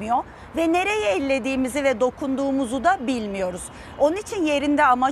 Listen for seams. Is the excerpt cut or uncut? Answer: uncut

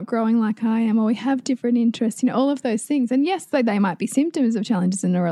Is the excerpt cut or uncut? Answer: uncut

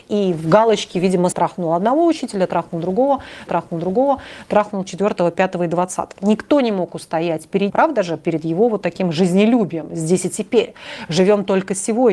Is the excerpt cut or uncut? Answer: cut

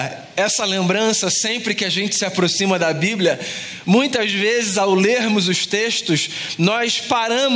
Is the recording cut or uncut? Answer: uncut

